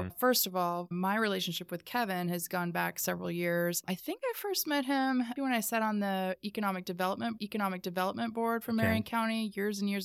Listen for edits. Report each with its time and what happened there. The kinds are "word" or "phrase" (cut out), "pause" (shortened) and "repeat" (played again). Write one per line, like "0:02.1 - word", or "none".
0:05.4 - word
0:07.4 - repeat